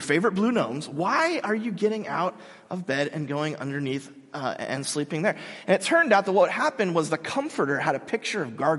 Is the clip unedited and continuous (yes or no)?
yes